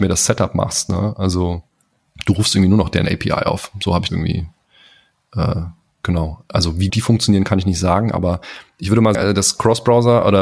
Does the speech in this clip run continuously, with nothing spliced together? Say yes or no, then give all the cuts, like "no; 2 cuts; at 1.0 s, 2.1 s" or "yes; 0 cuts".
no; 3 cuts; at 4.1 s, 6.9 s, 9.1 s